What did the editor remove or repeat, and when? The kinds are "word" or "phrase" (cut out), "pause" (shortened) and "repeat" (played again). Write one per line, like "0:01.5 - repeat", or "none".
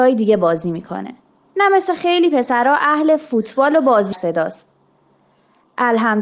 0:04.1 - phrase